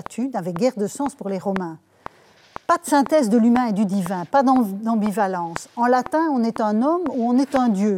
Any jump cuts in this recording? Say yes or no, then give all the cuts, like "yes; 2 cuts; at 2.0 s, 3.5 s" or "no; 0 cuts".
no; 0 cuts